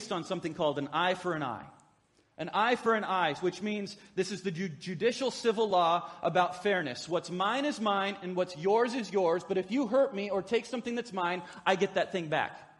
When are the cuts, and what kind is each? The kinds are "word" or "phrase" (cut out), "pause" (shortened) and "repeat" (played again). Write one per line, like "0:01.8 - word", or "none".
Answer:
none